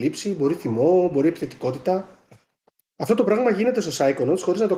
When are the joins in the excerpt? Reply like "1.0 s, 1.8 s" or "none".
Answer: none